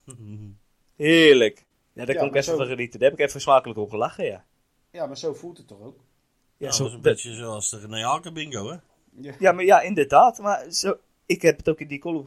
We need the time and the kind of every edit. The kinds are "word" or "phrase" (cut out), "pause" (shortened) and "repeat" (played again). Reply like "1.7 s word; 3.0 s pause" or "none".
none